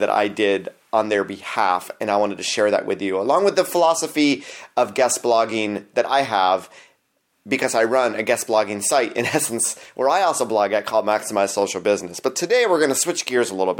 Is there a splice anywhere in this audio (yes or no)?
no